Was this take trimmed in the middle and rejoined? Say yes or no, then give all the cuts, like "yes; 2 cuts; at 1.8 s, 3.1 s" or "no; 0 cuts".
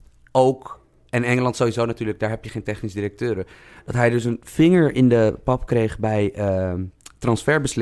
no; 0 cuts